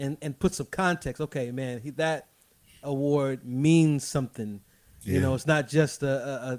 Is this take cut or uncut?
uncut